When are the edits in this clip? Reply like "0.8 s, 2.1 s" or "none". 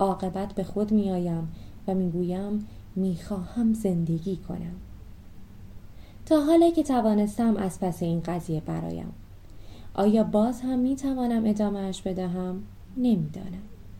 none